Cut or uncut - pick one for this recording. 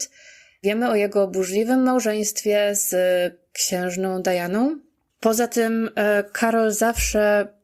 uncut